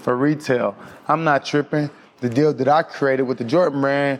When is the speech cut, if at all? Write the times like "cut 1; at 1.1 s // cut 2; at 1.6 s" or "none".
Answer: none